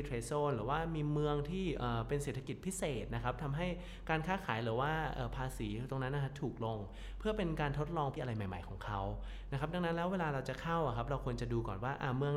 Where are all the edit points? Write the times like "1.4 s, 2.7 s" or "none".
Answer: 8.2 s